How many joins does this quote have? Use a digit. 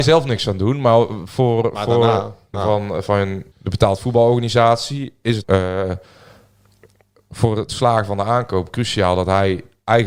3